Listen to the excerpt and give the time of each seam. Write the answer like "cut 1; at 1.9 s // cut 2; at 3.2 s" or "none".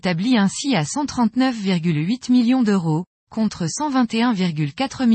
none